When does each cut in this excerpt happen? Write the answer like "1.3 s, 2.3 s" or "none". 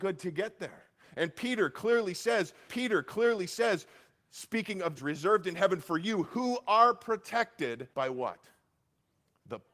2.7 s, 5.0 s, 7.9 s